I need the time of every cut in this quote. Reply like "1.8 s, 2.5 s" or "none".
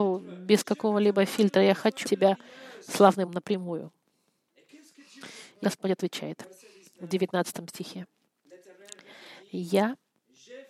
2.0 s, 3.3 s, 5.6 s